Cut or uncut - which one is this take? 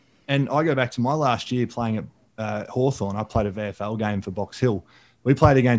uncut